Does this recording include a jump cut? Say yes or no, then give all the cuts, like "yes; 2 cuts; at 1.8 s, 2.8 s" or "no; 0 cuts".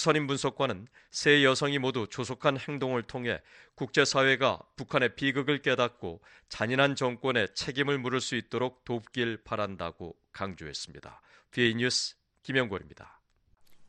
no; 0 cuts